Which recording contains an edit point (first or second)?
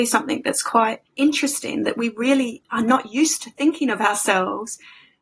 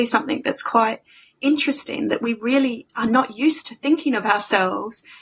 first